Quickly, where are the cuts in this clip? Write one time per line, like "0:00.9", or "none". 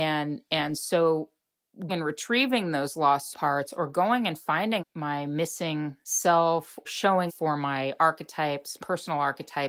0:01.9
0:03.3
0:04.8
0:06.9
0:07.3
0:08.8